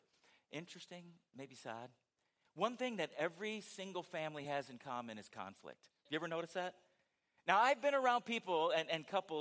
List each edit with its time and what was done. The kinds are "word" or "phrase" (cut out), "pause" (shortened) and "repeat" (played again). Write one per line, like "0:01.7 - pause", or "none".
none